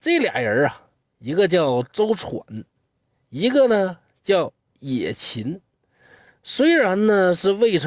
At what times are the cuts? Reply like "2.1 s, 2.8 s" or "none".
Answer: none